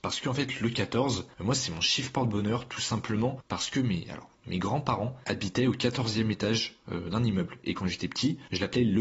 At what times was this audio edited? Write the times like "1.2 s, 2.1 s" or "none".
none